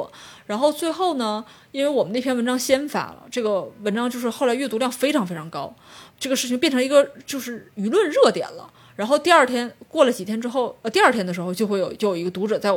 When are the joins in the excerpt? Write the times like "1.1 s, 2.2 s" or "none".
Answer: 6.1 s